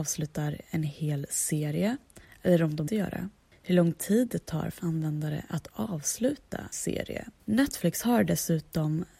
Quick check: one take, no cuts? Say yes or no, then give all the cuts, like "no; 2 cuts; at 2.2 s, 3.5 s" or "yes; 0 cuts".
no; 5 cuts; at 2.2 s, 2.9 s, 4.8 s, 6.7 s, 7.4 s